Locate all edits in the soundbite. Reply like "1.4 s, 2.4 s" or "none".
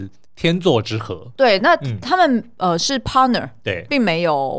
2.0 s